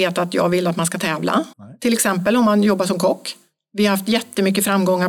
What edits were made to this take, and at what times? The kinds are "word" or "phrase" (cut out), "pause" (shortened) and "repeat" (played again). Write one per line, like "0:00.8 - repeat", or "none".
0:01.5 - pause